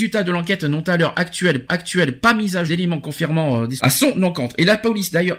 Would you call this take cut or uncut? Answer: cut